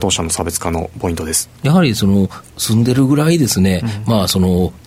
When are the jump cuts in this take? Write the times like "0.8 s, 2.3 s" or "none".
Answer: 1.5 s